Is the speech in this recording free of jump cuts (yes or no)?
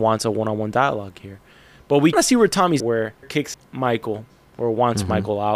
no